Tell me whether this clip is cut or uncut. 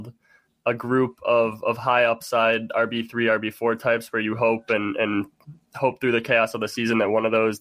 uncut